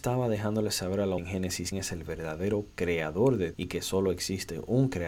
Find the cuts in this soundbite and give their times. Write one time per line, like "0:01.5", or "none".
0:01.2
0:01.7
0:03.5